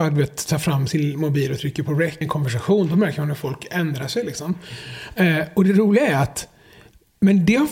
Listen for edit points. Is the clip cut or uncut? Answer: cut